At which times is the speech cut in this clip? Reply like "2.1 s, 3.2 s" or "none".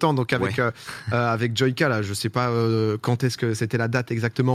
none